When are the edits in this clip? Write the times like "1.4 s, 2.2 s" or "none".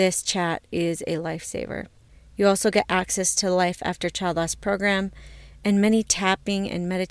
none